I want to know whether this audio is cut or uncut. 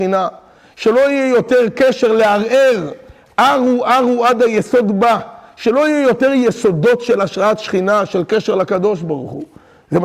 uncut